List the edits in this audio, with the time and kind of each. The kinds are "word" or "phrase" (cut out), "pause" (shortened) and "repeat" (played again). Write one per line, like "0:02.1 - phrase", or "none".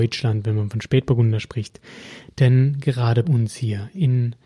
0:03.2 - word